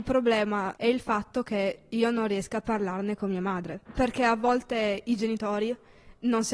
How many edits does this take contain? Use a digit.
1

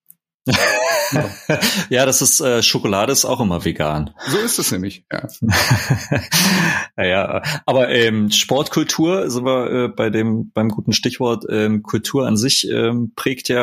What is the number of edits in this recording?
0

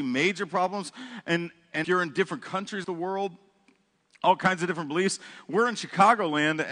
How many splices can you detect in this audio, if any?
2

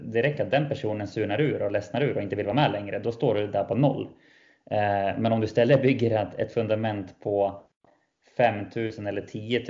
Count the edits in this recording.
0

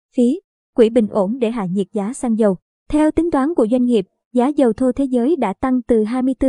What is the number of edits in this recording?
0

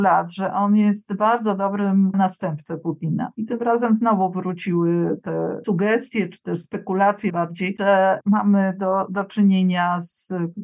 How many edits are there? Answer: 2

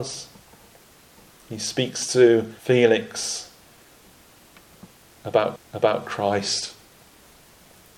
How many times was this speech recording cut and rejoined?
2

